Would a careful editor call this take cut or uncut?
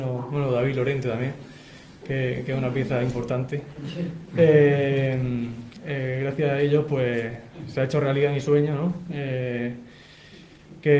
uncut